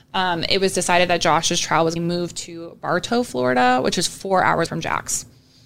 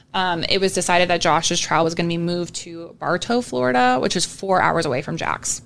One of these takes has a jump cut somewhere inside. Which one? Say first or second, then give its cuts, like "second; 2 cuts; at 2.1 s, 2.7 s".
first; 2 cuts; at 2.0 s, 4.7 s